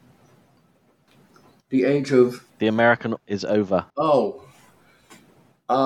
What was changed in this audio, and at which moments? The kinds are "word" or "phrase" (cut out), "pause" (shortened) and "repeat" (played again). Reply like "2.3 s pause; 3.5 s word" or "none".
2.5 s pause; 3.2 s word; 3.9 s pause